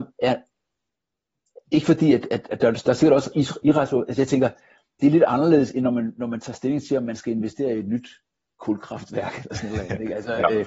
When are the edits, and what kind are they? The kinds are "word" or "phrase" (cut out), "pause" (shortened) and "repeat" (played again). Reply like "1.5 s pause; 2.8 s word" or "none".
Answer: none